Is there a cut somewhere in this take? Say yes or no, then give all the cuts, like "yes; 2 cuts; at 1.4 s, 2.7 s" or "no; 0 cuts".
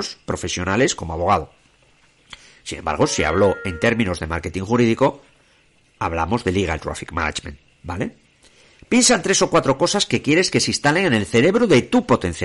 no; 0 cuts